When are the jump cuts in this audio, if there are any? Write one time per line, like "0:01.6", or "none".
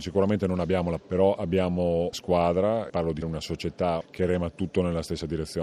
0:01.0
0:02.1
0:02.9
0:03.2
0:04.0